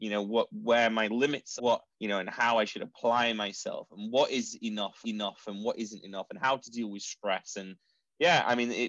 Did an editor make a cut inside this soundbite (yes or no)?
yes